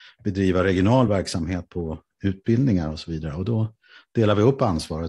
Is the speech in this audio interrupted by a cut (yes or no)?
no